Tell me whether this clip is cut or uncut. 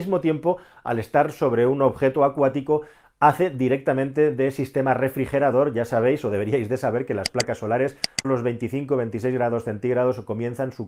cut